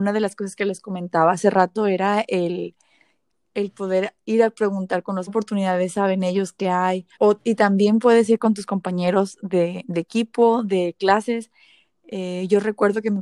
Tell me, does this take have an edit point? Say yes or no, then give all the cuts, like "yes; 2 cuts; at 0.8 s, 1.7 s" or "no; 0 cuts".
yes; 2 cuts; at 5.3 s, 7.1 s